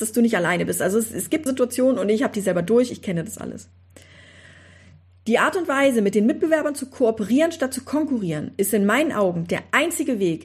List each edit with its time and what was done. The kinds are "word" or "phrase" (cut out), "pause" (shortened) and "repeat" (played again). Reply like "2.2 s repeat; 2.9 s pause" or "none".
1.5 s word